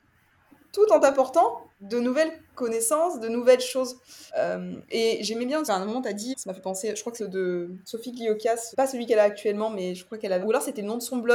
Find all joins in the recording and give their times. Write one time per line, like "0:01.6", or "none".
0:01.7
0:04.3
0:05.6
0:06.3
0:07.2
0:08.7
0:10.4